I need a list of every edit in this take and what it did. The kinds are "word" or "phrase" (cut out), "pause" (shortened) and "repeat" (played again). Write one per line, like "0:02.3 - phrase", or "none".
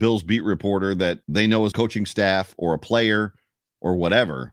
0:01.2 - pause
0:01.7 - phrase